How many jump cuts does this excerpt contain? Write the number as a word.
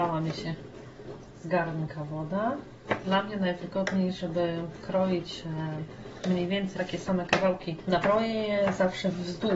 two